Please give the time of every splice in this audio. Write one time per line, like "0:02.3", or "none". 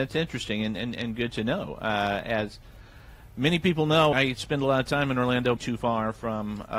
0:04.1
0:05.6